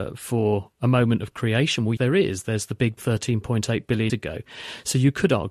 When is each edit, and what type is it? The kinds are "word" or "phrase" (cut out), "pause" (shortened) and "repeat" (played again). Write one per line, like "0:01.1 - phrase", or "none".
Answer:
0:02.0 - word
0:03.0 - word
0:04.1 - word